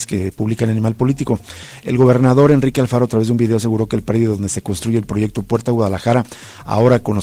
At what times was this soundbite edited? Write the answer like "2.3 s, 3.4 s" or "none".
none

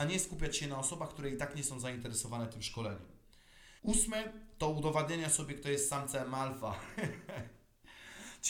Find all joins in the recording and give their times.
3.8 s

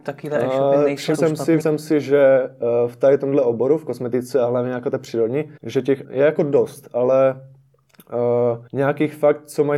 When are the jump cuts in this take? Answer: 1.1 s, 1.6 s, 5.6 s, 6.0 s, 8.7 s

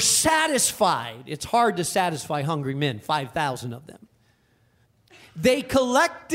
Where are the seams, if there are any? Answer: none

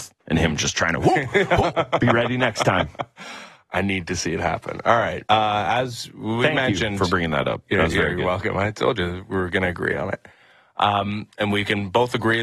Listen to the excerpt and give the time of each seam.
5.3 s

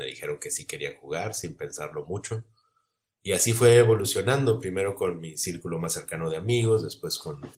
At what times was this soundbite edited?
none

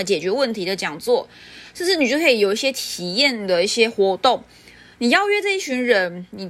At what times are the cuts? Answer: none

